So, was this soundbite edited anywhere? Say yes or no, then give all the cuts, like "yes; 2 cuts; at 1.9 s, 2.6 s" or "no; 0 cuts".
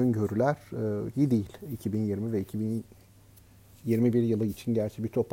yes; 1 cut; at 1.1 s